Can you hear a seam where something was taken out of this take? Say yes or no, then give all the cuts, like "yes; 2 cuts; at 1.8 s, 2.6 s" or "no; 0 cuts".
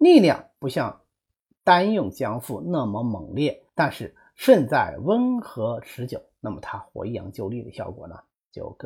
yes; 1 cut; at 3.7 s